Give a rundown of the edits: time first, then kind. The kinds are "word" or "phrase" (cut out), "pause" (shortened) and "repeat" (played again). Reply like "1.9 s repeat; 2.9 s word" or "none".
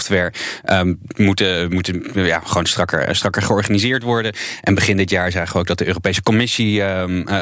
none